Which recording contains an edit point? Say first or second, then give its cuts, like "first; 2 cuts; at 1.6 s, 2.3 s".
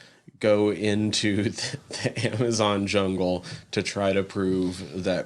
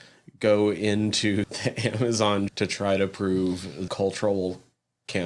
second; 3 cuts; at 1.4 s, 2.5 s, 3.9 s